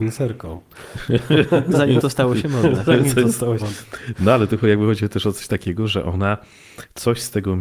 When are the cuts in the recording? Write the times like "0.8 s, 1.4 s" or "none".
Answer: 3.6 s